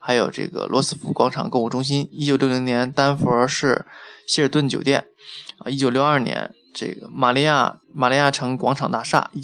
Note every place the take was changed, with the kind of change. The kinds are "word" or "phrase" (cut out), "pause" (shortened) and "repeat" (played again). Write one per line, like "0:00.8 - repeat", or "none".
0:07.8 - pause